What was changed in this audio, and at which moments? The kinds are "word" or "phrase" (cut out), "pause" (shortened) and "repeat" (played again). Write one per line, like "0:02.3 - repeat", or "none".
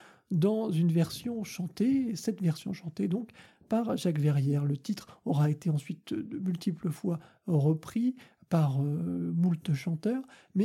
none